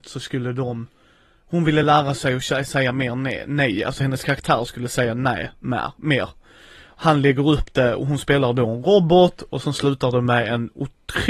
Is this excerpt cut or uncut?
uncut